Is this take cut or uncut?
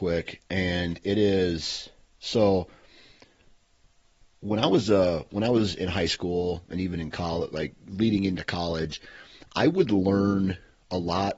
uncut